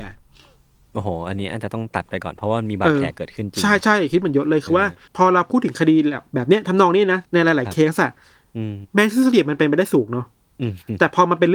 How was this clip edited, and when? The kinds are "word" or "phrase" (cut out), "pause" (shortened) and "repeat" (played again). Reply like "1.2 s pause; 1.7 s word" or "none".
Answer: 5.1 s pause; 7.2 s pause; 8.9 s pause